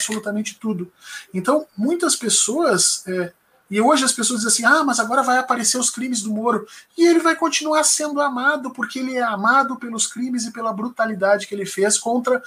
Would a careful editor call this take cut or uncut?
uncut